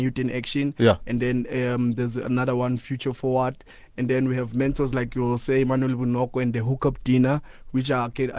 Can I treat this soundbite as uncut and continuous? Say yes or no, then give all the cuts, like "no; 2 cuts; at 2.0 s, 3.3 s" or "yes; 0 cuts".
yes; 0 cuts